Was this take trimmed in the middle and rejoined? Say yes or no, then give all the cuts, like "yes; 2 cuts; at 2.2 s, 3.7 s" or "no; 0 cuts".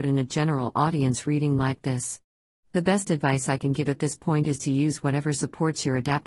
no; 0 cuts